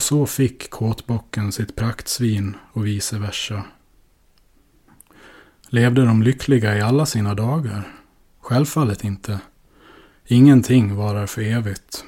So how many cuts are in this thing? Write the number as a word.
zero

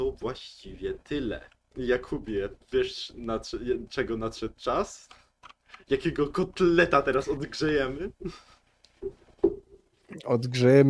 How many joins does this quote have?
zero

